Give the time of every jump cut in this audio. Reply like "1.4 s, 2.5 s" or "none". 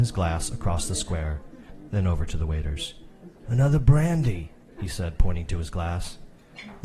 3.4 s